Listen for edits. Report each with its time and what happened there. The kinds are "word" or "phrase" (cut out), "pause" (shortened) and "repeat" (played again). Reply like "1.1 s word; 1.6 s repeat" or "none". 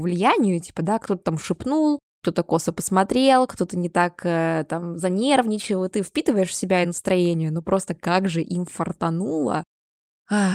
6.8 s phrase